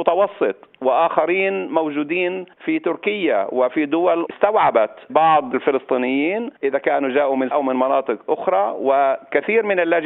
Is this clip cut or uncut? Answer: cut